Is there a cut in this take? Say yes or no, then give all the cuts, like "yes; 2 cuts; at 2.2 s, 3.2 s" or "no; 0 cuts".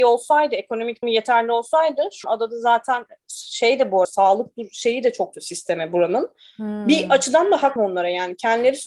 yes; 5 cuts; at 1.0 s, 2.2 s, 4.0 s, 5.3 s, 7.8 s